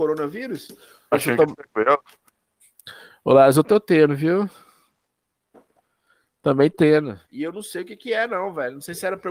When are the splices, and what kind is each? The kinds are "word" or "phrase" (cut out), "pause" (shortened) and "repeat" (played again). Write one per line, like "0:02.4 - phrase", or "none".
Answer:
0:01.1 - word
0:03.6 - word
0:06.7 - word
0:07.3 - pause